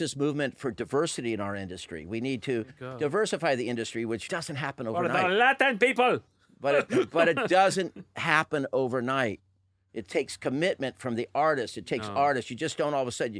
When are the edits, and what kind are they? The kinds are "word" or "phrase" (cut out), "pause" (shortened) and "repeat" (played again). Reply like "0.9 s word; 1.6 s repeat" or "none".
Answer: 4.3 s phrase